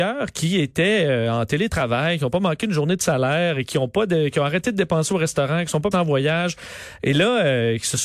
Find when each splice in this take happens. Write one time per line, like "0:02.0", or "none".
0:05.9